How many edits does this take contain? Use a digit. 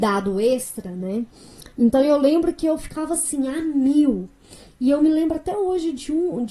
0